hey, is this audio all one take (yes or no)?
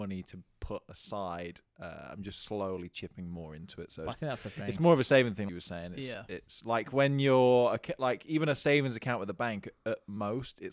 no